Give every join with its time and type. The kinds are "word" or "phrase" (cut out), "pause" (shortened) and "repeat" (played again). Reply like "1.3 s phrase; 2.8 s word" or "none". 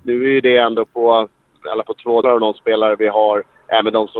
1.8 s word; 2.2 s word

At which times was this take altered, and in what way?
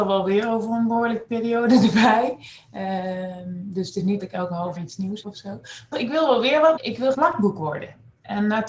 4.2 s word; 4.8 s word; 5.2 s word; 5.9 s word; 6.8 s word; 7.1 s word

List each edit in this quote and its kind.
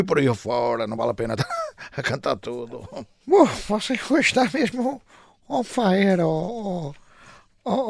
none

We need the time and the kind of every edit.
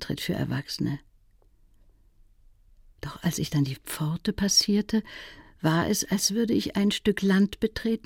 none

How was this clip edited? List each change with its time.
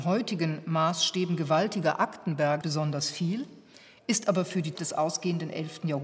2.6 s word; 4.7 s word

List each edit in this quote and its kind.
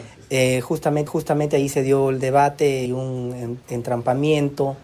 1.1 s repeat; 2.9 s word; 3.6 s pause

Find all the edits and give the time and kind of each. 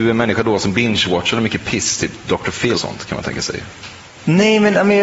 2.7 s word

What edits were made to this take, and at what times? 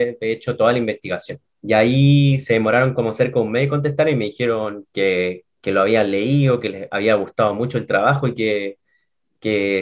1.5 s pause

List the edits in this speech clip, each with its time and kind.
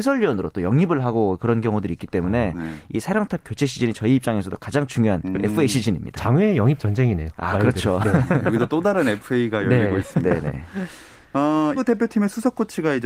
11.8 s word

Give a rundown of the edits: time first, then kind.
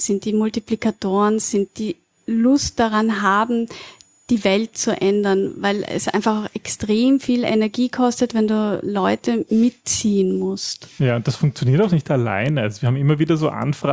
none

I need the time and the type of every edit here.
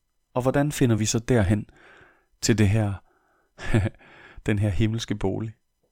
none

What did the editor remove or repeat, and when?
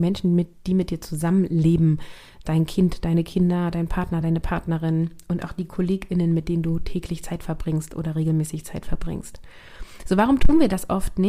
none

